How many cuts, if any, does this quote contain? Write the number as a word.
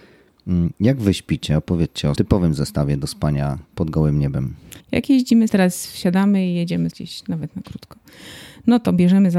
four